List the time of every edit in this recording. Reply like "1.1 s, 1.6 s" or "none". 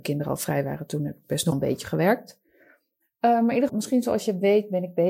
1.5 s, 3.7 s